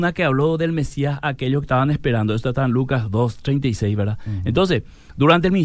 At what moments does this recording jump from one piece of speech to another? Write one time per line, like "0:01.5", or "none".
0:01.6